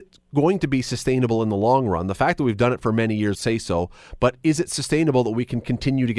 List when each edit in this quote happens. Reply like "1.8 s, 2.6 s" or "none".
3.3 s